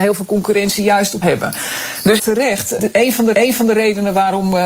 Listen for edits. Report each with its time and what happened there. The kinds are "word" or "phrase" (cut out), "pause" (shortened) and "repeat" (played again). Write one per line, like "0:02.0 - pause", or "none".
0:01.2 - word
0:02.2 - word
0:02.8 - word
0:03.3 - repeat